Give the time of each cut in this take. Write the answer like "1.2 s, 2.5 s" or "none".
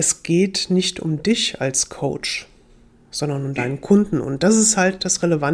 none

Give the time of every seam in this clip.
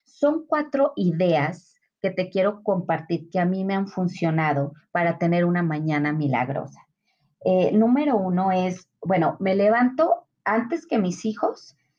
none

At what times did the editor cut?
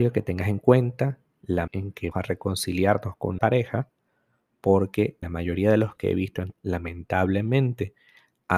1.7 s, 2.1 s, 3.4 s, 5.2 s, 6.0 s, 6.5 s

